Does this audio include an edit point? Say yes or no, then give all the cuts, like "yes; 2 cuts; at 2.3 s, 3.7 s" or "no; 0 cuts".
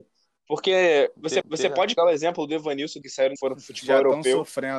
yes; 4 cuts; at 1.4 s, 2.0 s, 3.0 s, 3.4 s